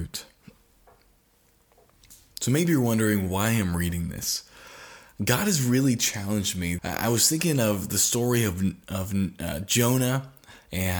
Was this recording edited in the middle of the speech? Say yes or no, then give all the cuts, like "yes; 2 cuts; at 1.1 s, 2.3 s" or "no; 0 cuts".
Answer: yes; 1 cut; at 6.8 s